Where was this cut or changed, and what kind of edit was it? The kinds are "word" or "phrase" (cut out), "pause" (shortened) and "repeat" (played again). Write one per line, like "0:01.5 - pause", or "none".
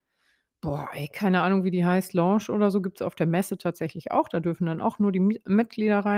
none